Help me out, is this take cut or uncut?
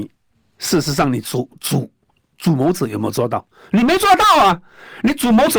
uncut